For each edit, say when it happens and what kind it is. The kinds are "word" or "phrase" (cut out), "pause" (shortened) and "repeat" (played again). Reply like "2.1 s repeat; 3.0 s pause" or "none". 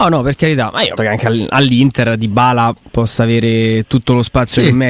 1.0 s word